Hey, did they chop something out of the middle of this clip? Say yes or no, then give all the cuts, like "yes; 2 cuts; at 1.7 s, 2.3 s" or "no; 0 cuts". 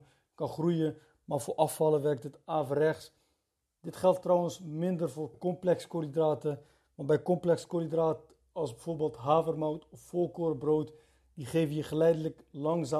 no; 0 cuts